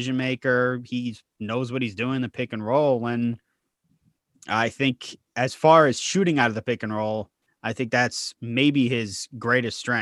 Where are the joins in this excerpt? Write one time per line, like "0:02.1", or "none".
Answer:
none

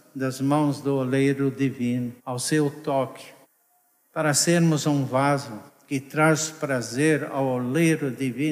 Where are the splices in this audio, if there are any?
0:02.2
0:03.4
0:05.7

